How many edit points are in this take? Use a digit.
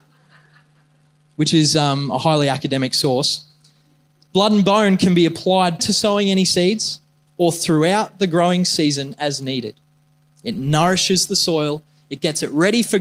1